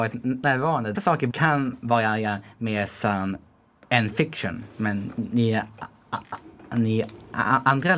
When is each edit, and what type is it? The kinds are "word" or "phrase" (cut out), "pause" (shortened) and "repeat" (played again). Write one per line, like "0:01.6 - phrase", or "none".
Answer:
0:00.9 - phrase
0:01.3 - word
0:03.7 - pause